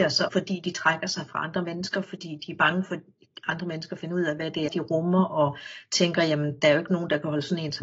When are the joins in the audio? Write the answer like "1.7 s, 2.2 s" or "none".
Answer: 4.7 s

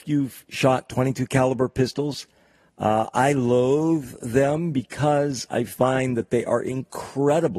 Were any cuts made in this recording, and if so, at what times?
none

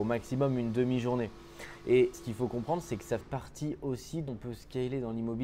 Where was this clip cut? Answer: 2.1 s, 3.2 s, 4.3 s

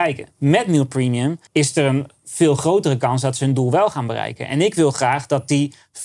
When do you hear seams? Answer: 1.5 s

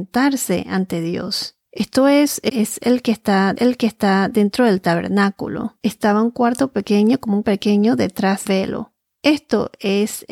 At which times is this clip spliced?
1.6 s, 2.5 s, 3.5 s, 5.8 s, 7.4 s, 8.5 s

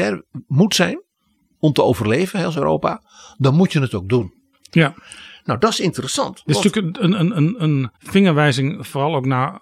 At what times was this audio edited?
8.0 s

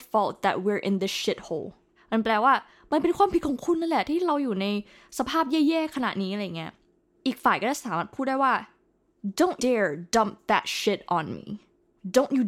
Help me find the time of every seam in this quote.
9.6 s

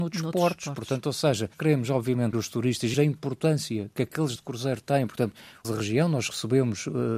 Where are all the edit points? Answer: 1.5 s, 2.3 s, 2.9 s, 4.4 s, 5.6 s

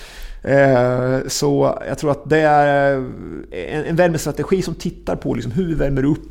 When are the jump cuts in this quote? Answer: 3.8 s

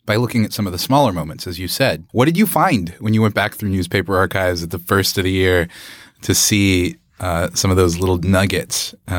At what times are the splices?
2.1 s

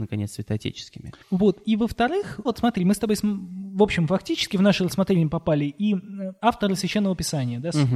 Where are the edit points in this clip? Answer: 1.2 s, 2.4 s

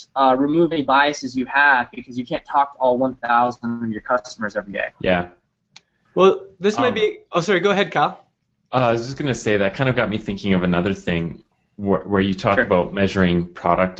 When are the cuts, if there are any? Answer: 4.9 s

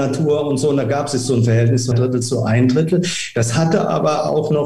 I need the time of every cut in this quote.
1.9 s

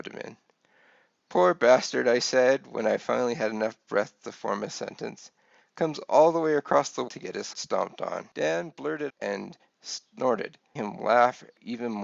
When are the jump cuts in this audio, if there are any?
7.1 s, 7.5 s, 9.1 s, 10.8 s

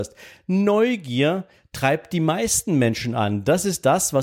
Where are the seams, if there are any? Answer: none

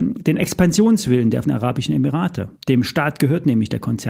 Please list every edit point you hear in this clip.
1.4 s, 2.6 s

